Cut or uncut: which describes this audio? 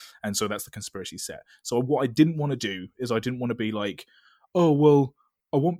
uncut